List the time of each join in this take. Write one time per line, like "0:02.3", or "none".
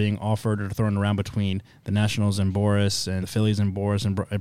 0:03.2